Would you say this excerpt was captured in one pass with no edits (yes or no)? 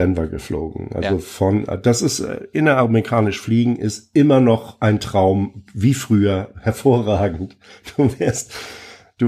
yes